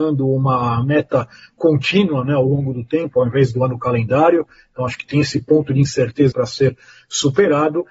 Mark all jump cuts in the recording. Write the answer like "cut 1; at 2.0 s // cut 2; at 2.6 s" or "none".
cut 1; at 6.3 s